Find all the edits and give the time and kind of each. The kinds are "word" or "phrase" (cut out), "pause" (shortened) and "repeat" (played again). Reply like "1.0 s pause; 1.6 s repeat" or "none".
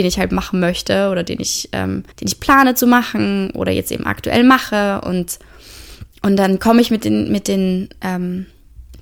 2.1 s pause; 6.1 s pause